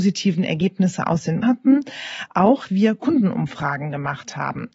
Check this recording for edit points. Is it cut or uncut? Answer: cut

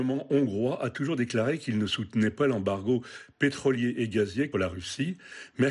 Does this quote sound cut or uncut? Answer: cut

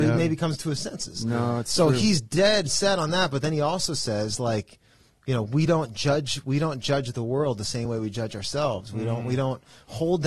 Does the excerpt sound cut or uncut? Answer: uncut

